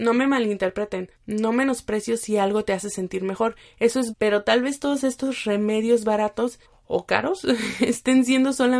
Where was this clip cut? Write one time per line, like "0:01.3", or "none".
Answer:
0:01.1
0:04.1
0:06.6